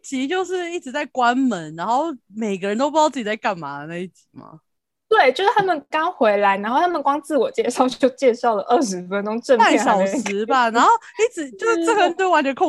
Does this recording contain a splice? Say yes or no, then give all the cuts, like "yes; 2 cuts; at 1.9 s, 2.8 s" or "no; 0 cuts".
no; 0 cuts